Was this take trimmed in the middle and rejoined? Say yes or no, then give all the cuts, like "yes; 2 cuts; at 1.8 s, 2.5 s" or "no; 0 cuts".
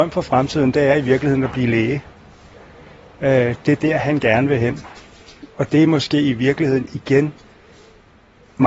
no; 0 cuts